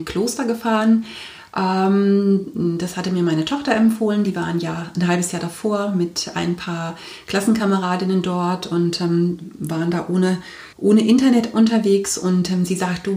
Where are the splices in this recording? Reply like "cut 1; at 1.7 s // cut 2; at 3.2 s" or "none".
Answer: cut 1; at 10.7 s